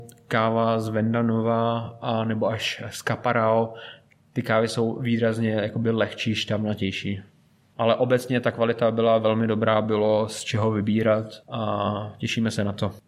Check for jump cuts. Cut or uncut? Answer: uncut